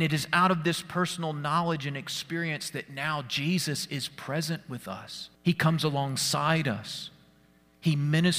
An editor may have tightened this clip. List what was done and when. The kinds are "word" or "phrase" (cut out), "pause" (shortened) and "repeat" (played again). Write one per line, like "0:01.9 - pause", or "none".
0:05.4 - pause